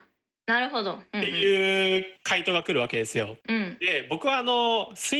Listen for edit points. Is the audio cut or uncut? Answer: cut